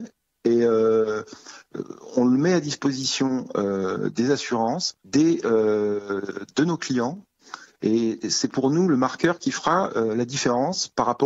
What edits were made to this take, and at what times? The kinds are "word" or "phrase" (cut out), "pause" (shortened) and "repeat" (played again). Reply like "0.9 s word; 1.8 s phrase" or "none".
5.0 s pause